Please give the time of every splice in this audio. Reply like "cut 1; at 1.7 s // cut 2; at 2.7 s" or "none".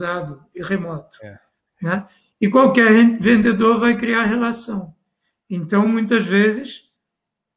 none